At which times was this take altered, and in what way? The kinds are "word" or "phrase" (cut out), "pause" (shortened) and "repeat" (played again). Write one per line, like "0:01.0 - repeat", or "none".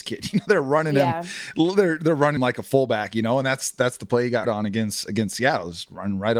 0:02.4 - word
0:04.4 - word